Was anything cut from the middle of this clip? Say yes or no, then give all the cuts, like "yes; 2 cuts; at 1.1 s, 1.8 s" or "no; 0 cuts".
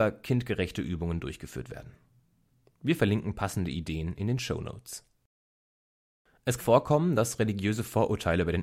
yes; 1 cut; at 6.6 s